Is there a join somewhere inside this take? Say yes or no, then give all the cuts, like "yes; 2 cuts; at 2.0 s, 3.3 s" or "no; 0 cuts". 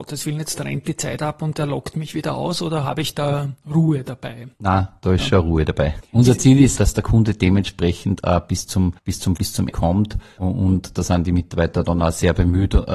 yes; 5 cuts; at 4.5 s, 6.8 s, 9.0 s, 9.4 s, 9.7 s